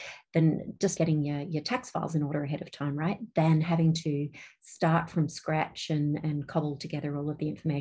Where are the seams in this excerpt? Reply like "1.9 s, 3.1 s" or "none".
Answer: 1.0 s